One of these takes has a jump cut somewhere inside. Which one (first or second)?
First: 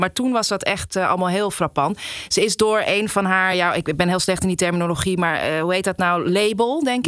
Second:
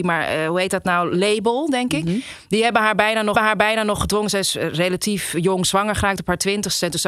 second